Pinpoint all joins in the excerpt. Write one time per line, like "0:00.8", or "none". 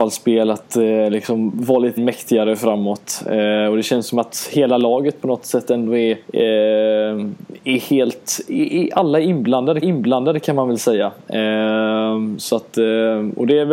0:02.0
0:06.2
0:09.8